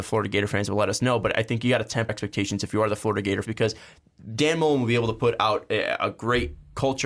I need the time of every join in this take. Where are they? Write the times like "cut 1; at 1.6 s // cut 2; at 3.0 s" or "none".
cut 1; at 2.1 s // cut 2; at 3.4 s